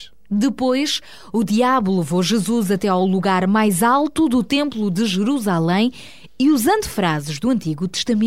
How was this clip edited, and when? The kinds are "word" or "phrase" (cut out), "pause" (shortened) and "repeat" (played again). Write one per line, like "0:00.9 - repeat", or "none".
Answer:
none

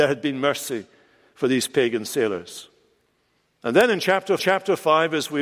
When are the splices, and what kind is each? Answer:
0:04.4 - repeat

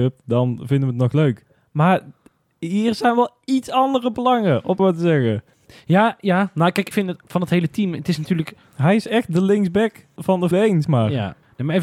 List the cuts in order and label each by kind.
0:04.8 - word
0:06.9 - word
0:10.2 - word
0:10.5 - word
0:10.8 - word

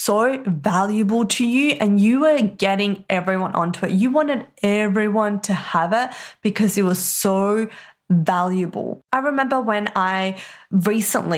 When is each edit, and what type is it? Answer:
none

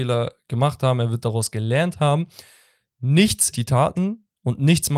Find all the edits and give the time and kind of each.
0:03.5 - word

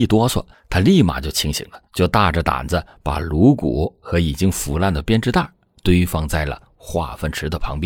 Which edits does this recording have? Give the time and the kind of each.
0:01.9 - pause

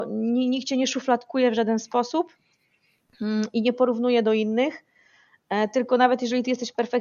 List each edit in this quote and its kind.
none

